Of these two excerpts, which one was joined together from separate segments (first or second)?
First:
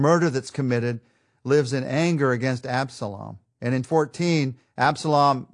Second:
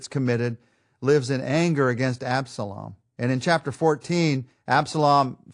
first